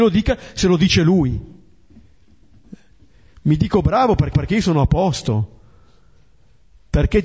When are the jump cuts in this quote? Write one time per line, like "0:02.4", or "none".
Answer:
0:04.3

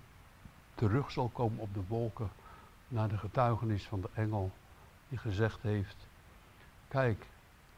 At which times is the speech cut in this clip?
none

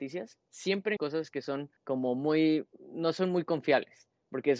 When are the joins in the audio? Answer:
0:01.0
0:01.8
0:02.7

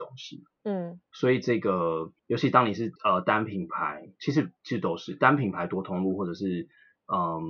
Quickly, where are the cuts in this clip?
0:01.0
0:02.2
0:03.0
0:04.2

